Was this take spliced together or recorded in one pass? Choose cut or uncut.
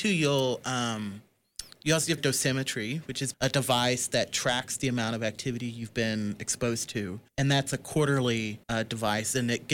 cut